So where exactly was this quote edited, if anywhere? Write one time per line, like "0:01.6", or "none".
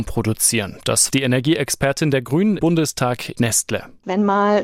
0:01.1
0:02.6
0:03.3

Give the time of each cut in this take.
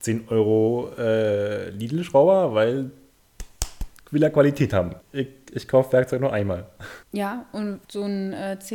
0:05.0
0:07.0
0:07.8

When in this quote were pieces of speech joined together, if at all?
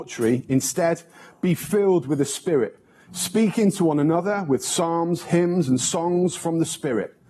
none

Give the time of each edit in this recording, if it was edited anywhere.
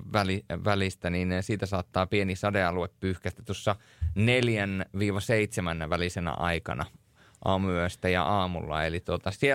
none

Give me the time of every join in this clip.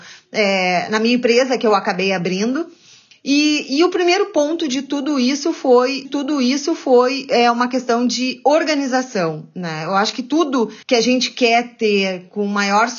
0:06.0
0:10.8

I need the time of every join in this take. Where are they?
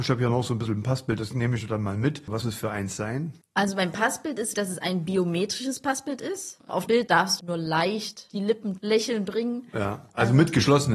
0:02.4
0:04.5
0:06.9
0:07.4
0:08.8

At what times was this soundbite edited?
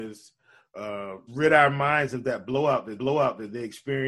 0:01.3
0:03.0

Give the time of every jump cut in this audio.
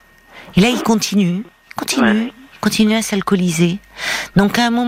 none

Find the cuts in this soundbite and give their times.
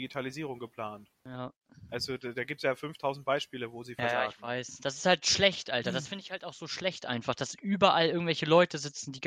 0:01.2

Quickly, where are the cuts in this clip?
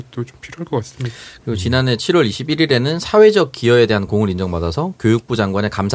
none

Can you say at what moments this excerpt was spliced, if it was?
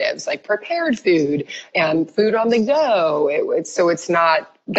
none

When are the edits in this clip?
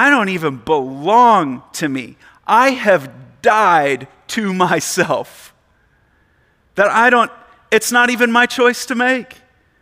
none

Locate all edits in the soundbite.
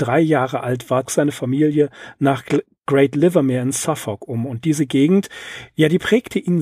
0:01.0

